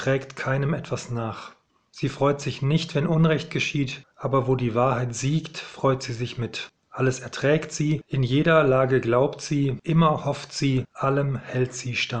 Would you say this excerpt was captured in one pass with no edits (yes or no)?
yes